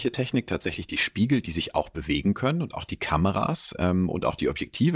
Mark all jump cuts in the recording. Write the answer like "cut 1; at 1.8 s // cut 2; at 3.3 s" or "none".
none